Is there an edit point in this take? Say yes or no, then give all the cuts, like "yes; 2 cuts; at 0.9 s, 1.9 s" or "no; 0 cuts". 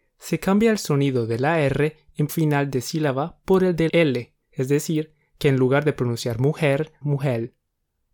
yes; 4 cuts; at 2.3 s, 3.9 s, 4.4 s, 7.0 s